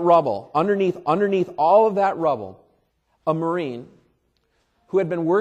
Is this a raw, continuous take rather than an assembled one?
no; 2 cuts; at 1.0 s, 2.9 s

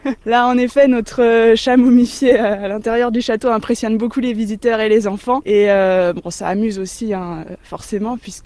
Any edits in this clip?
no; 0 cuts

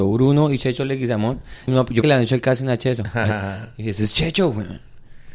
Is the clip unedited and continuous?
no; 2 cuts; at 1.7 s, 2.0 s

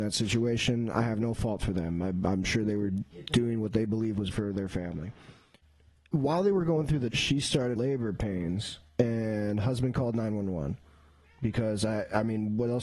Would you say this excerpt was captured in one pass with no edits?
no; 4 cuts; at 4.3 s, 7.1 s, 7.8 s, 8.9 s

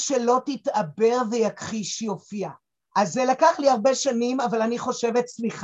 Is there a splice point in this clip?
yes; 1 cut; at 2.7 s

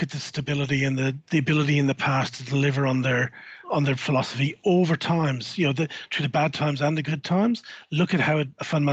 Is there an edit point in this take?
no; 0 cuts

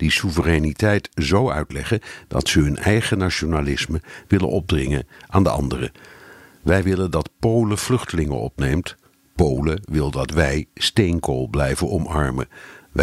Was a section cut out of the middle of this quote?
no; 0 cuts

